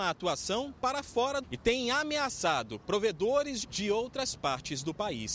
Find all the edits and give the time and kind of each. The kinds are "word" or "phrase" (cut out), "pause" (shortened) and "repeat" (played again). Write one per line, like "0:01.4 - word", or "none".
0:01.4 - word
0:03.6 - word